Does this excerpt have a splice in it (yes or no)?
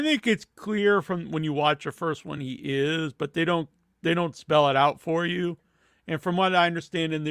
no